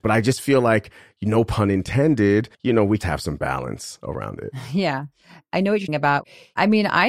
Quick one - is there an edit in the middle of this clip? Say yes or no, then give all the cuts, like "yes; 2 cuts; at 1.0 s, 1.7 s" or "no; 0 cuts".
yes; 3 cuts; at 2.5 s, 3.0 s, 5.9 s